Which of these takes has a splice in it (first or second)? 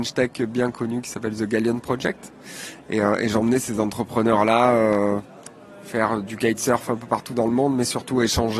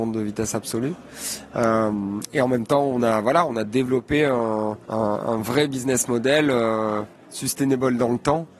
second